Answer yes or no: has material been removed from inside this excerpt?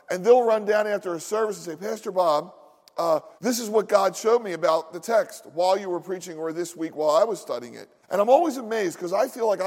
yes